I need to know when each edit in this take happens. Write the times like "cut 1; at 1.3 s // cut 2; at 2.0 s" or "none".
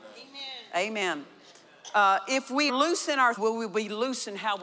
cut 1; at 2.7 s // cut 2; at 3.4 s